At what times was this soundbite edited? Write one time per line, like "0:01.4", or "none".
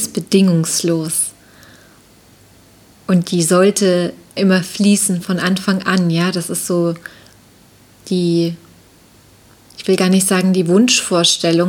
0:04.4

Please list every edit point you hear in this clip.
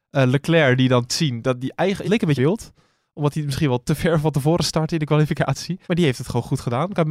0:01.1
0:02.0
0:02.4
0:05.8

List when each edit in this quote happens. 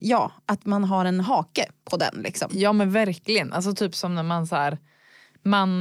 none

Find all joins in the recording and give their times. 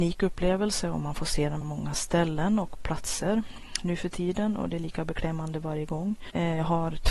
0:01.6

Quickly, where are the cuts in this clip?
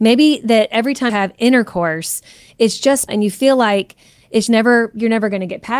0:01.1
0:03.1
0:04.5

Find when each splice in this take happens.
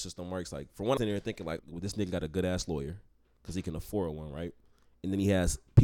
0:01.0
0:01.6

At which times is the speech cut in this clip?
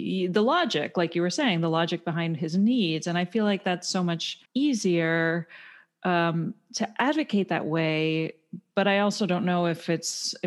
0:04.5

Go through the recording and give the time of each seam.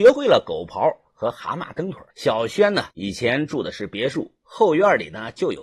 0:02.1
0:02.9

